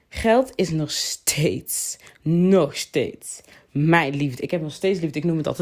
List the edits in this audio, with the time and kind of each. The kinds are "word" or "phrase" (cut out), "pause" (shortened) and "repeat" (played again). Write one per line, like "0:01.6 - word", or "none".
none